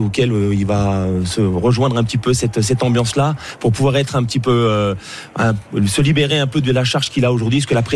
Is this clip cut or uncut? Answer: uncut